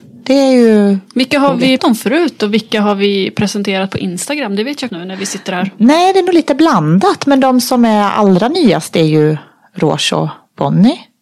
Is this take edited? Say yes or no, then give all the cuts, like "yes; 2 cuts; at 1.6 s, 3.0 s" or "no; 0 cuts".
yes; 2 cuts; at 1.8 s, 4.9 s